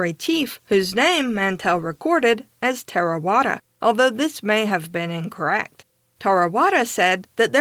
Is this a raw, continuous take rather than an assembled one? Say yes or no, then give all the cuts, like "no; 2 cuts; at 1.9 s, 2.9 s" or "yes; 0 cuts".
yes; 0 cuts